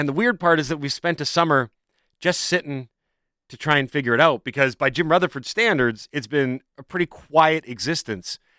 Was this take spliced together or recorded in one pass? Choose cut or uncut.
uncut